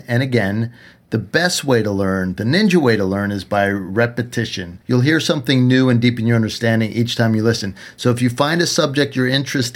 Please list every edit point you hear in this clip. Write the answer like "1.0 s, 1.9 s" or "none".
4.8 s